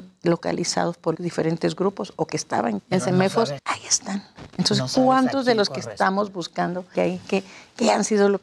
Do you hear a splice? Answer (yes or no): yes